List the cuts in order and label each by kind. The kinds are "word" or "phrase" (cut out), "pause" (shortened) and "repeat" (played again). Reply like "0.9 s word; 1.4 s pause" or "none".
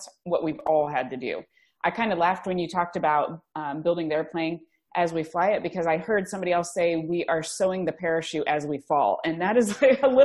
none

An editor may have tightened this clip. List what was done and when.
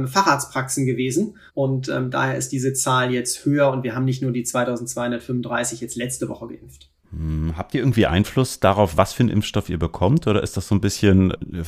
1.5 s pause

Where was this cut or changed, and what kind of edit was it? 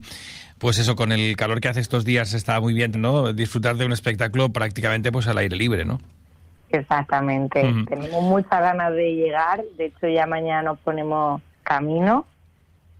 2.9 s word; 6.6 s pause; 11.6 s word

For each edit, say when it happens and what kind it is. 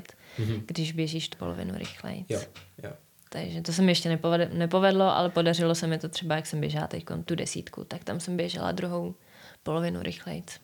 1.3 s word; 7.2 s word

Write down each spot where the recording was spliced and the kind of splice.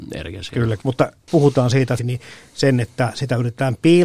1.2 s pause; 2.0 s phrase

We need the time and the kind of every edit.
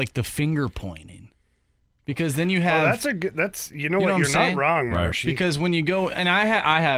none

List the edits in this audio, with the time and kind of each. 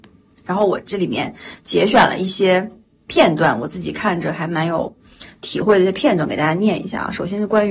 none

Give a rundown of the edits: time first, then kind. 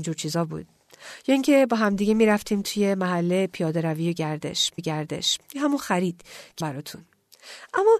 4.8 s repeat; 6.6 s word

